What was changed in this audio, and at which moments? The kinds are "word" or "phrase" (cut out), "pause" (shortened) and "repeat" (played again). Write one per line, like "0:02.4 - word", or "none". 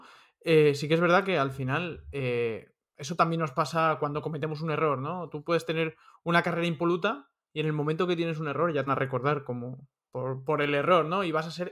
0:08.9 - word